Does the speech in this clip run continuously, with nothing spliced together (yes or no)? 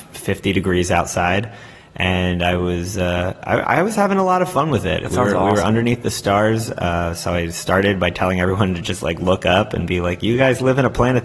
yes